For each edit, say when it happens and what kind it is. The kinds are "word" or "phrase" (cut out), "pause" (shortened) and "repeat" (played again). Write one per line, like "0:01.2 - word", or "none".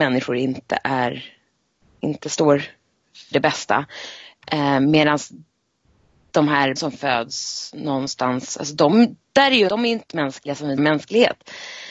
0:03.3 - word
0:06.8 - word
0:09.7 - word
0:10.1 - word
0:10.8 - word